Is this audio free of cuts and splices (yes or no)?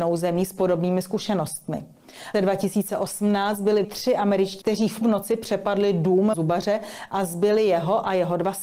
no